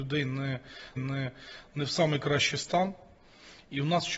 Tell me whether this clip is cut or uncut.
cut